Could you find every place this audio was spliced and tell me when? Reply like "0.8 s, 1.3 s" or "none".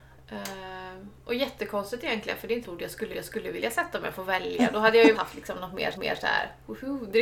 2.6 s, 3.1 s, 5.1 s, 5.9 s